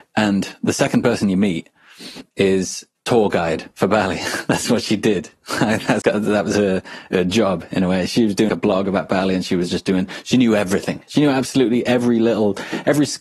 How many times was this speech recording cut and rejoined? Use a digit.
3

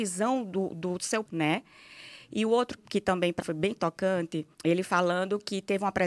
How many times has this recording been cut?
4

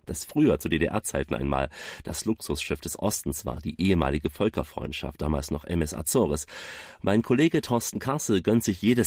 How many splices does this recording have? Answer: 0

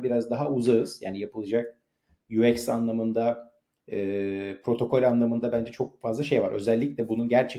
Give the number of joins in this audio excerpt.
0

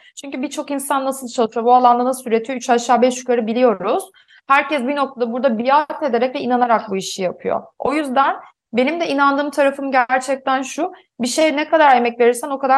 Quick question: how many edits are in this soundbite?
0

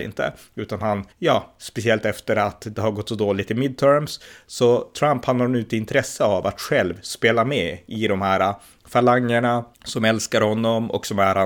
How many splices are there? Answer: 2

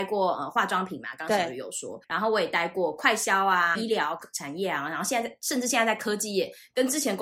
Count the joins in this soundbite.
2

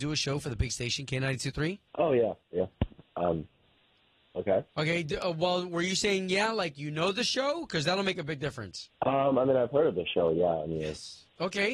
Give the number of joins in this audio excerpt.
3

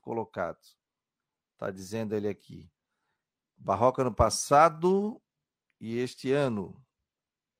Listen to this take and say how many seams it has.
0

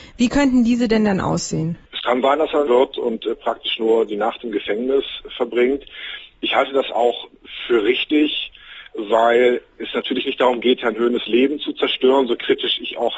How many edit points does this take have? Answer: 2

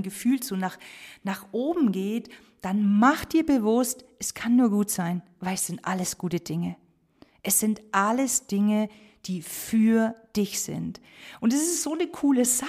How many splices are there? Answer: 0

